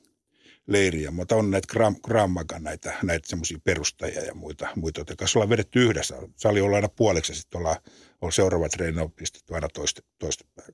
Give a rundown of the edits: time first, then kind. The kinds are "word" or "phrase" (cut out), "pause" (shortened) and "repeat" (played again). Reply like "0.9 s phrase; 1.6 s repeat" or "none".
none